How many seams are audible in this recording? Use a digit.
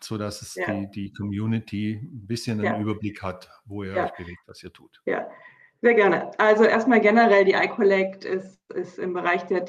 0